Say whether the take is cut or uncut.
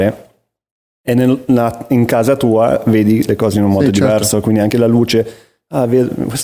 uncut